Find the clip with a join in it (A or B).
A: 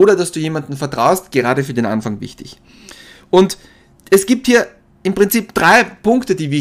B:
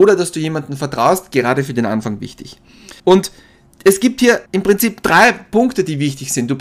B